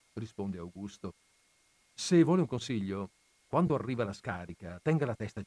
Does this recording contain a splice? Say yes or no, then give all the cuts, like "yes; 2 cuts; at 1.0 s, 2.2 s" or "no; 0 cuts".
no; 0 cuts